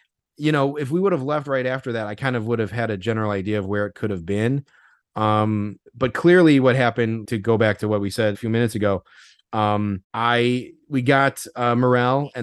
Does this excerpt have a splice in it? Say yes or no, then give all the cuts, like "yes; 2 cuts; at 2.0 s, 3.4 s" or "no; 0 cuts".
yes; 4 cuts; at 5.9 s, 7.2 s, 8.3 s, 10.0 s